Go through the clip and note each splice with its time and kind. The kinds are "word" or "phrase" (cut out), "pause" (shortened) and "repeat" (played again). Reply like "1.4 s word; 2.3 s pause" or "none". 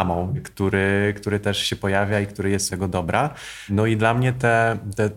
2.7 s word